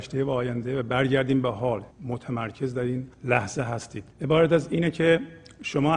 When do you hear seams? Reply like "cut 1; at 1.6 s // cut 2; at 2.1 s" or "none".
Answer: cut 1; at 1.9 s // cut 2; at 3.1 s // cut 3; at 4.1 s

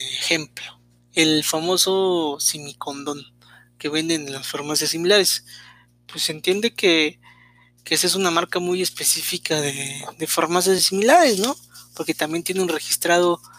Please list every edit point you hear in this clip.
none

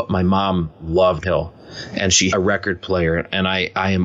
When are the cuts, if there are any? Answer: cut 1; at 1.2 s // cut 2; at 2.3 s

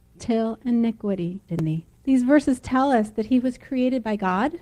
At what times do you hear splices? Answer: cut 1; at 1.5 s // cut 2; at 1.9 s

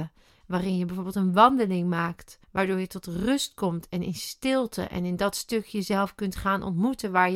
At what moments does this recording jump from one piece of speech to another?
cut 1; at 2.4 s

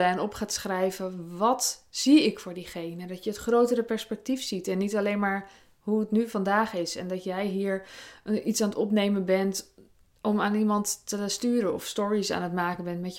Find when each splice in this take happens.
none

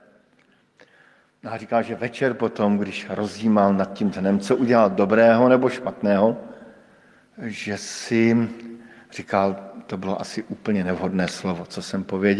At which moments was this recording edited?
none

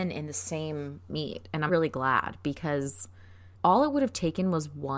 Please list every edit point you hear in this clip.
cut 1; at 1.1 s // cut 2; at 1.7 s // cut 3; at 3.5 s

